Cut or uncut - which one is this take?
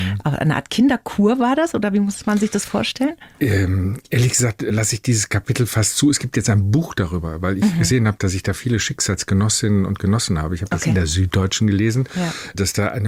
cut